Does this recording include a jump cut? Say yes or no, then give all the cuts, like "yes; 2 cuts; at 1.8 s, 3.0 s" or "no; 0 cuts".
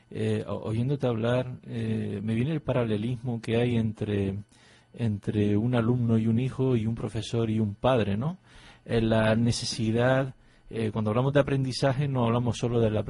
no; 0 cuts